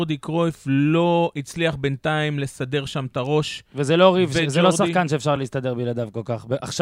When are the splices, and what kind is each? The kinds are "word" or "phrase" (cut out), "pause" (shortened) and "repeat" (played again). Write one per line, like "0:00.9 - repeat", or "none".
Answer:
none